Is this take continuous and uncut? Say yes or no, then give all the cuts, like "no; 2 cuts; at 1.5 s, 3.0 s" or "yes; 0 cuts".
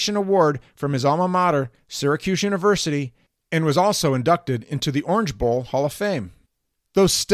yes; 0 cuts